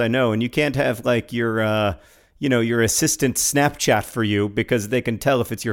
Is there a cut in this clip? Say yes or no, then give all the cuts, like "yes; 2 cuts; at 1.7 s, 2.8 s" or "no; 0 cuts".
no; 0 cuts